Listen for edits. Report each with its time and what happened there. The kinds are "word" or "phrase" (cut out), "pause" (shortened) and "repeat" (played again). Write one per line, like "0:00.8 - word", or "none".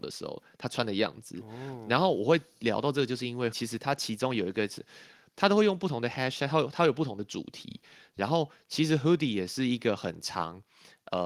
0:03.5 - word